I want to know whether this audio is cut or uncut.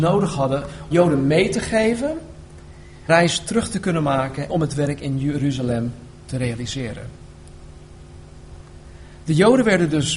cut